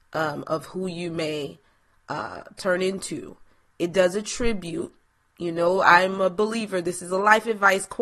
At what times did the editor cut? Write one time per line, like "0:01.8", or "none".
none